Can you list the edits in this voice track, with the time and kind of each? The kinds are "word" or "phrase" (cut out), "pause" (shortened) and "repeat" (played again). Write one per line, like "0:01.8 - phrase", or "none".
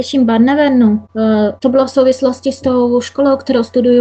none